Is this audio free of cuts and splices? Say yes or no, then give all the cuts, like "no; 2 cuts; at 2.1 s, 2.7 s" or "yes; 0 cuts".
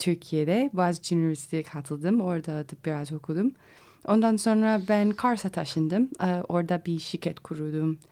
yes; 0 cuts